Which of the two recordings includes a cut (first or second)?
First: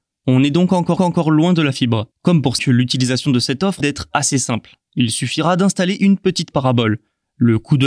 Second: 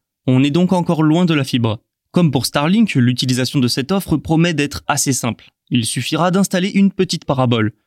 first